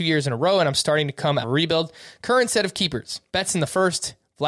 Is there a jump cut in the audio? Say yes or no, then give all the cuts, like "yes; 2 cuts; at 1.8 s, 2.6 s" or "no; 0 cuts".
yes; 2 cuts; at 1.4 s, 3.3 s